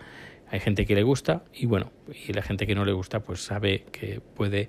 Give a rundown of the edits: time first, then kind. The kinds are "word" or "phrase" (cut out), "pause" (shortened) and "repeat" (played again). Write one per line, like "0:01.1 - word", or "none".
0:01.4 - pause